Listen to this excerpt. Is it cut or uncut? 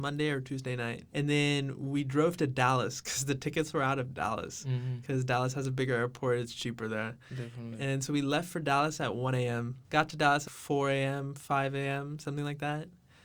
cut